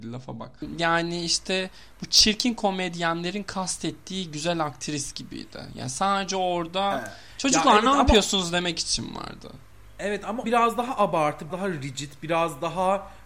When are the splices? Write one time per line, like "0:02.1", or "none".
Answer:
0:10.4
0:11.5

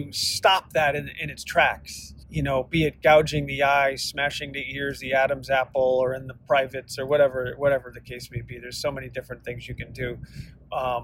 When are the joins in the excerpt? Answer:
0:02.2

